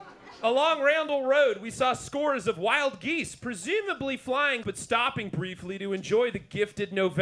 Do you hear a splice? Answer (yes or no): yes